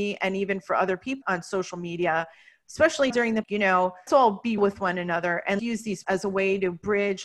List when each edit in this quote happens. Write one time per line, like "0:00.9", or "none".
0:01.2
0:03.1
0:03.4
0:04.1
0:04.6
0:05.6
0:06.0